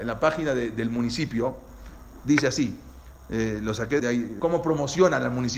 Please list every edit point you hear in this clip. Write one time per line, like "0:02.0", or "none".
0:04.0
0:04.4